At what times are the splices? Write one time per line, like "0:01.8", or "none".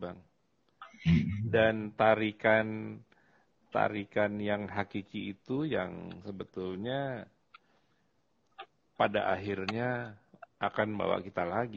none